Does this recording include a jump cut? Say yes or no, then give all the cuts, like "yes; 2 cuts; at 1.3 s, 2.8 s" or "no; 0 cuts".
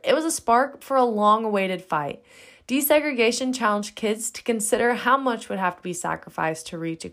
no; 0 cuts